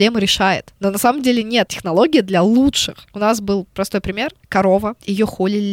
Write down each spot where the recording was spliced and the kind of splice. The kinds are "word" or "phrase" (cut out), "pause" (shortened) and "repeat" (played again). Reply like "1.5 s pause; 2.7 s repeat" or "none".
1.7 s word

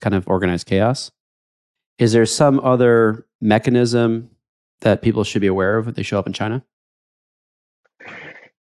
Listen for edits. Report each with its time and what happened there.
none

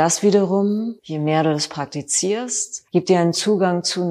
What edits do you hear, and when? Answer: 1.0 s pause; 2.9 s pause

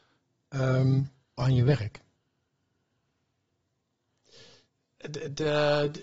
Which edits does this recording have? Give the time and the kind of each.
1.4 s phrase

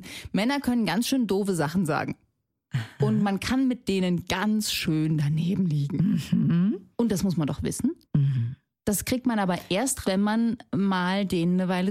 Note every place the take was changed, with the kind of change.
6.9 s pause; 8.0 s pause; 10.0 s word

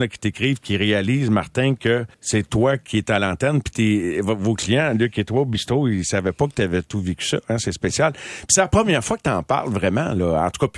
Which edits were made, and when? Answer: 2.1 s pause

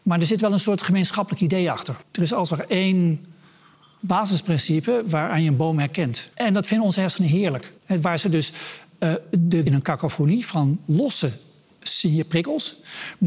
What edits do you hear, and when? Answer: 2.0 s pause; 6.3 s pause; 7.8 s pause; 9.7 s phrase

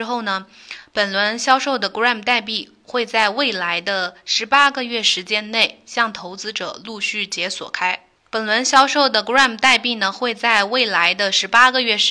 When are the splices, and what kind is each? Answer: 8.2 s pause

